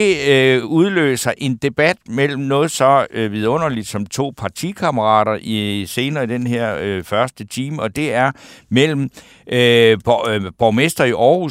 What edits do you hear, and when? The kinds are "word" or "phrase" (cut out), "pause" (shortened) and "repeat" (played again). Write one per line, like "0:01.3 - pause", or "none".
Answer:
none